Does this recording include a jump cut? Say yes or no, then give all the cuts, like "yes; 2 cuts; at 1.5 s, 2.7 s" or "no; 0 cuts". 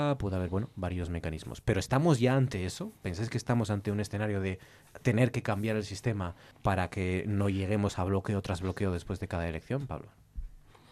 yes; 1 cut; at 6.5 s